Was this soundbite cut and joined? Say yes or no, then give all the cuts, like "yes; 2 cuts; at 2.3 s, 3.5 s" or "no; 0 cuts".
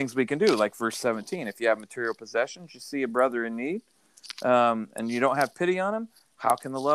no; 0 cuts